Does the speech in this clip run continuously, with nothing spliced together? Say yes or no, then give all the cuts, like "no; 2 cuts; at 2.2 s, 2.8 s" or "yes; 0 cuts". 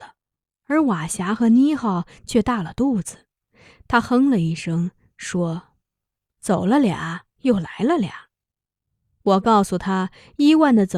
yes; 0 cuts